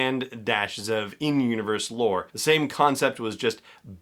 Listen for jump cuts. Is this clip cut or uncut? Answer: cut